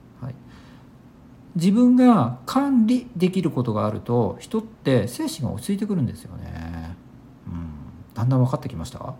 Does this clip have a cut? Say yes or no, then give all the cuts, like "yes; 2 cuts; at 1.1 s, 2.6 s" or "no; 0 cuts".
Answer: no; 0 cuts